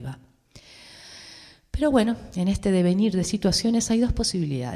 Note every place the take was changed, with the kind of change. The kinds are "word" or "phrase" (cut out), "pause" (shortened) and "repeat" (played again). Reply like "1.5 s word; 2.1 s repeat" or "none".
none